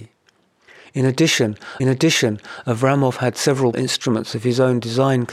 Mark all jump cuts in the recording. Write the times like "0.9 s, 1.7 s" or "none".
1.8 s, 3.7 s